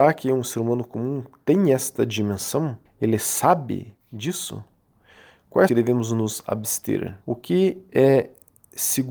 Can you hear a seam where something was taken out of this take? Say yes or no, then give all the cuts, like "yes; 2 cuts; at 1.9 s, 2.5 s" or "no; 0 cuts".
yes; 4 cuts; at 2.9 s, 4.0 s, 5.7 s, 7.2 s